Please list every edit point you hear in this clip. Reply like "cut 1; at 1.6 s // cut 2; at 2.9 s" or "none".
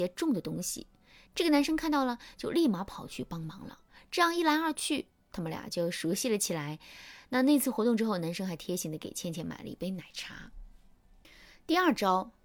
cut 1; at 3.9 s

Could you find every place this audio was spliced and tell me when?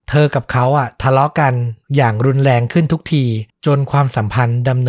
cut 1; at 1.8 s // cut 2; at 3.5 s

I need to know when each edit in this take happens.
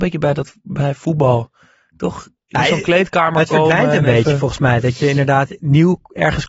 none

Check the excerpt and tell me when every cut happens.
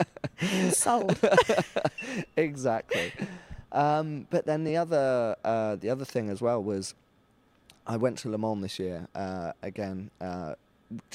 none

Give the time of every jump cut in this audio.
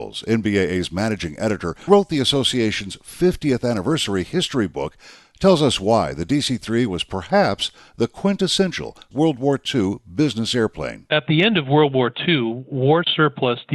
cut 1; at 1.9 s // cut 2; at 9.1 s

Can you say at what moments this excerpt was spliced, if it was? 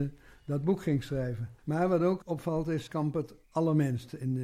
cut 1; at 1.6 s // cut 2; at 2.2 s // cut 3; at 2.9 s // cut 4; at 3.4 s

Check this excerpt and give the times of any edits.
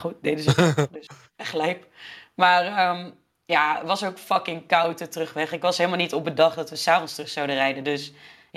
none

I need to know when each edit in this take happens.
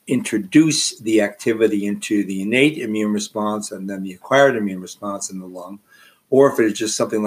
none

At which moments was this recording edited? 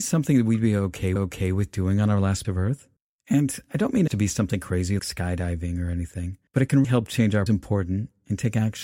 cut 1; at 1.2 s // cut 2; at 2.4 s // cut 3; at 3.0 s // cut 4; at 4.1 s // cut 5; at 5.0 s // cut 6; at 6.5 s // cut 7; at 6.8 s // cut 8; at 7.5 s

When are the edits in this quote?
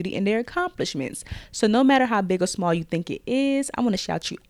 none

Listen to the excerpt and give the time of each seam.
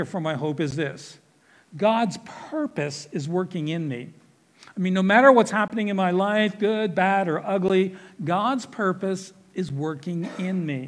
none

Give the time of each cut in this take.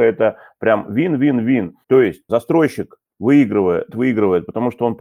cut 1; at 1.8 s // cut 2; at 2.3 s // cut 3; at 3.9 s

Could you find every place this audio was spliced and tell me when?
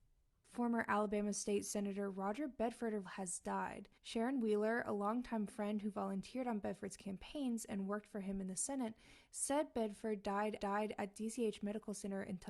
cut 1; at 3.1 s // cut 2; at 4.0 s // cut 3; at 10.6 s

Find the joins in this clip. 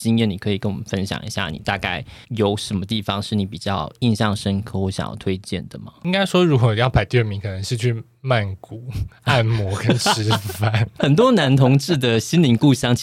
cut 1; at 2.2 s

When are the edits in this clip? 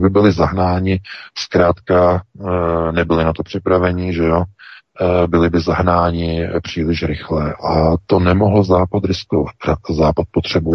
none

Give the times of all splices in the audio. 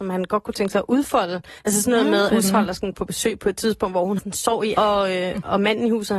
cut 1; at 1.6 s // cut 2; at 2.3 s // cut 3; at 2.9 s // cut 4; at 4.2 s // cut 5; at 4.7 s

